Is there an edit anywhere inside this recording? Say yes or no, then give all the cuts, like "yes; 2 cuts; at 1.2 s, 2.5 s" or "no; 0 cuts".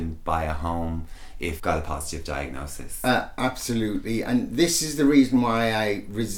yes; 1 cut; at 1.6 s